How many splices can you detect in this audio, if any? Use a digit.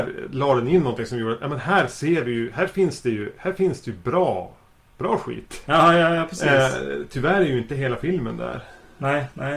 0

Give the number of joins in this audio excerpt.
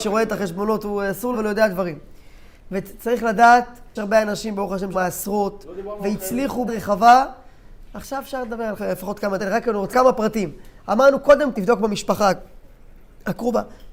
8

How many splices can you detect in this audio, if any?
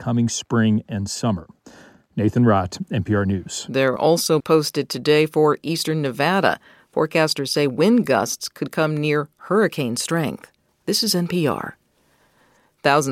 3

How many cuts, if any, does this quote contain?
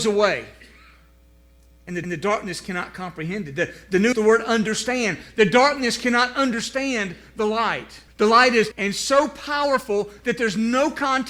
4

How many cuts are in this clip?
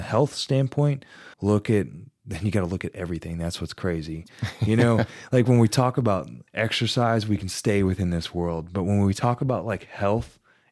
2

